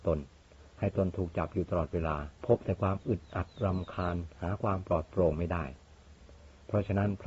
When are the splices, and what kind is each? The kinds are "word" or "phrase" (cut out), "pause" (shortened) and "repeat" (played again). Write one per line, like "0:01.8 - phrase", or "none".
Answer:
0:02.4 - pause